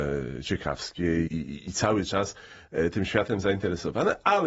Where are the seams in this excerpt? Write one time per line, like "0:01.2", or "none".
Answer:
0:01.3